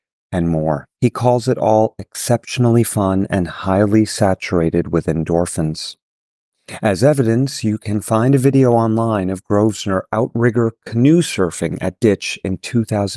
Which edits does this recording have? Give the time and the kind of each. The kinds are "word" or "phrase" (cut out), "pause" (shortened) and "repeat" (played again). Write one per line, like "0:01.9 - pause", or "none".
0:01.0 - pause